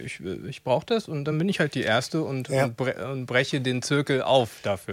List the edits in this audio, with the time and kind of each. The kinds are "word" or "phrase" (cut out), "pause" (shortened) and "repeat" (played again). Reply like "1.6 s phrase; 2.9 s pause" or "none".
none